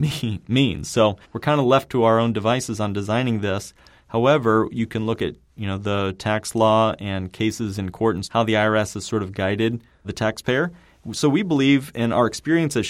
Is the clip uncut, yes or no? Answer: no